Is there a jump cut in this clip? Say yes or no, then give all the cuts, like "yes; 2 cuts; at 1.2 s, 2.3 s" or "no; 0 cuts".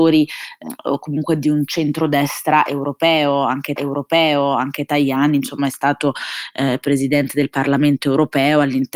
yes; 1 cut; at 3.8 s